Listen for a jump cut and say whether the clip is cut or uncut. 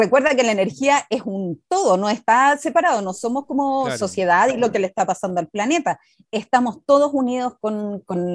uncut